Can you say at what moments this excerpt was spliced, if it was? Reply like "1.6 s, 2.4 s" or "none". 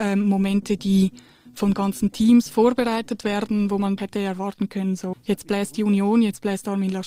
4.0 s, 5.1 s